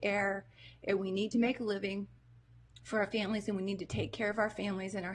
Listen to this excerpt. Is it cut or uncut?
uncut